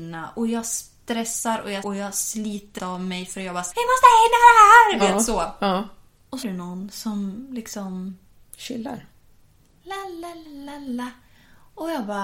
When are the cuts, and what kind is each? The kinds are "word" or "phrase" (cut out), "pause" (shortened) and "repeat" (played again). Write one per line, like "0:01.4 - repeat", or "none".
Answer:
0:01.8 - word
0:02.8 - word
0:03.7 - word
0:05.0 - word
0:06.4 - word
0:10.4 - word